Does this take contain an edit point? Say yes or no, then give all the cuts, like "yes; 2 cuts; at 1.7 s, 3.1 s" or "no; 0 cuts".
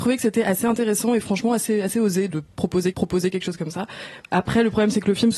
yes; 2 cuts; at 2.3 s, 2.9 s